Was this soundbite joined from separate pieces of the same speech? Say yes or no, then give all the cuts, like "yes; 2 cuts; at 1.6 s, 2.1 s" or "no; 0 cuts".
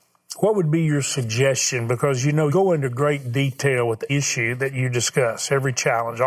yes; 2 cuts; at 2.5 s, 4.1 s